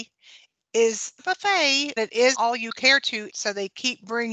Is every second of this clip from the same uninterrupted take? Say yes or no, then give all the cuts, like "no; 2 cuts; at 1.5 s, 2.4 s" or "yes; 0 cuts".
no; 4 cuts; at 1.2 s, 2.0 s, 2.3 s, 3.3 s